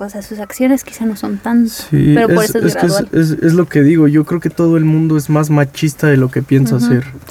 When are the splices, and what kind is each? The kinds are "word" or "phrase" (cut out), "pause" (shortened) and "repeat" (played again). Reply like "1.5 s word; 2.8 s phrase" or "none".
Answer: none